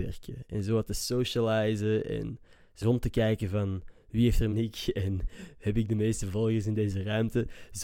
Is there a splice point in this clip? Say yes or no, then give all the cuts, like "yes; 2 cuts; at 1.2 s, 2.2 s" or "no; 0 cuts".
yes; 2 cuts; at 2.8 s, 4.5 s